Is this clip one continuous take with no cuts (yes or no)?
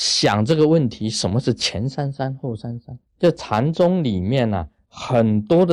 no